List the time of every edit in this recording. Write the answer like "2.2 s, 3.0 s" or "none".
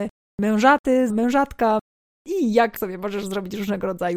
1.1 s, 2.8 s